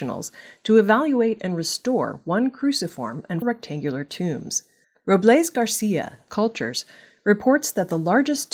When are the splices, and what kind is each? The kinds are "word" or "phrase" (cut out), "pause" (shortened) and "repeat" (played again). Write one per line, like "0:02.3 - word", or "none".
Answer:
0:03.4 - word
0:04.8 - pause
0:06.3 - phrase